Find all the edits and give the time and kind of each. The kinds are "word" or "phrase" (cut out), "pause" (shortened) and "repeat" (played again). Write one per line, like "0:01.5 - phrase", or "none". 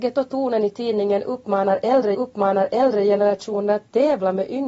0:02.1 - repeat